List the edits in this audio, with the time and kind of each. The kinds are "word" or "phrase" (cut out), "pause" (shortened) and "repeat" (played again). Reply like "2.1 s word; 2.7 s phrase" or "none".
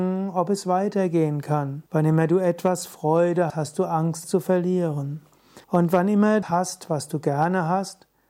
1.9 s pause; 3.5 s word; 4.2 s word; 5.6 s pause; 6.4 s phrase